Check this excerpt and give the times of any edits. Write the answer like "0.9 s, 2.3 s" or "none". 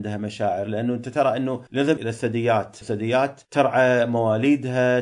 1.7 s, 3.4 s